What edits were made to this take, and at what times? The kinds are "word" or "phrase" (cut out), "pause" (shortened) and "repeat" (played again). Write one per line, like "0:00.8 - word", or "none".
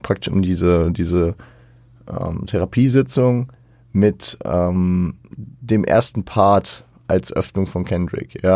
none